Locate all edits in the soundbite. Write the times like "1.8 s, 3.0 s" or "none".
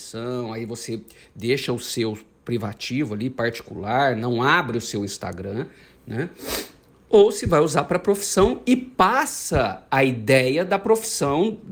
none